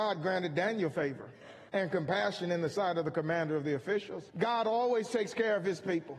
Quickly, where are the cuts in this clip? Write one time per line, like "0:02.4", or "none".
0:01.7
0:04.3